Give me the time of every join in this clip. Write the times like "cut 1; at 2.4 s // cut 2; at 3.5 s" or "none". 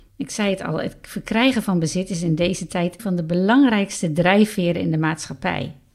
cut 1; at 3.0 s